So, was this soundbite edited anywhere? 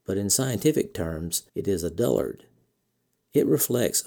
yes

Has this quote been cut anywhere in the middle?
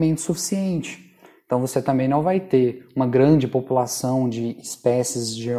no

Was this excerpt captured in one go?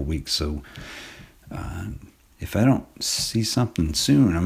yes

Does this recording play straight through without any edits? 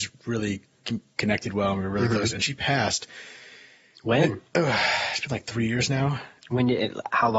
no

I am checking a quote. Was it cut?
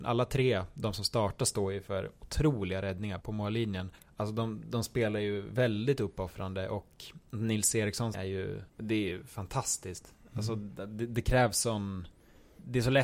yes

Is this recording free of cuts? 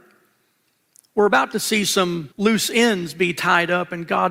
no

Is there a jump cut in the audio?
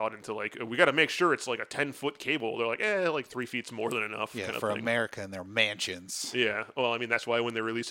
no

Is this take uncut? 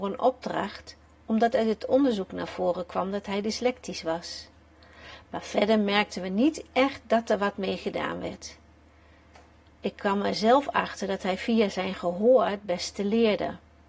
yes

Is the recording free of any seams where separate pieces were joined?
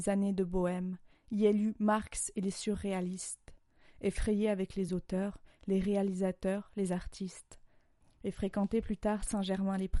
yes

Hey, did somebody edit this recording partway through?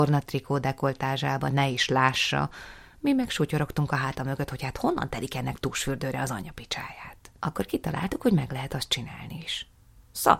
yes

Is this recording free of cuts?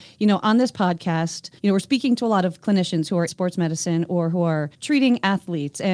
no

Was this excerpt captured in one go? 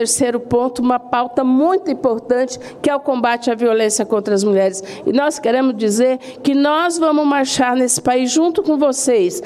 yes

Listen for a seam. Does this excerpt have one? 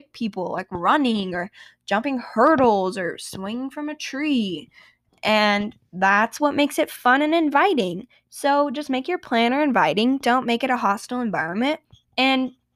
no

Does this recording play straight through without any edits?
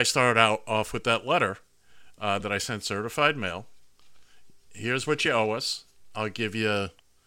yes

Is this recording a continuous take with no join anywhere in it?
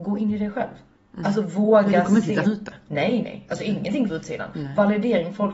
no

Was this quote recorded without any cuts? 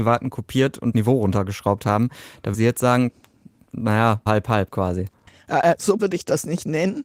no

